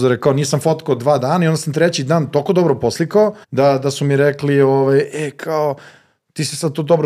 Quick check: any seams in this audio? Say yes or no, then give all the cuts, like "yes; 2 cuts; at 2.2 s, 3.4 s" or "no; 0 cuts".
yes; 1 cut; at 3.4 s